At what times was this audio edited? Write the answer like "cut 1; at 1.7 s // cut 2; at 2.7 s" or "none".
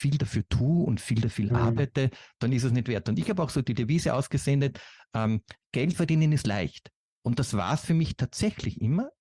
none